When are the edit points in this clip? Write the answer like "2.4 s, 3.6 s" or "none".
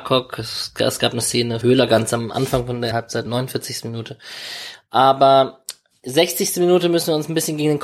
1.6 s, 2.9 s, 3.3 s